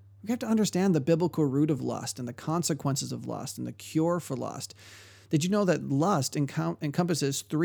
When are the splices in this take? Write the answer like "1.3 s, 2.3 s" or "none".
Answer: none